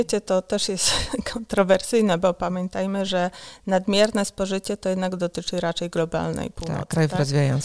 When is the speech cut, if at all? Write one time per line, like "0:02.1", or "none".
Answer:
none